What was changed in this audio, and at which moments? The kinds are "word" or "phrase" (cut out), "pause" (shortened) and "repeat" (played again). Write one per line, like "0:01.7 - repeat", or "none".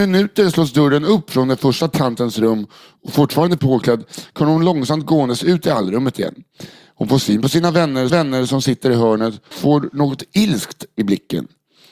0:03.6 - word
0:08.1 - repeat
0:09.5 - word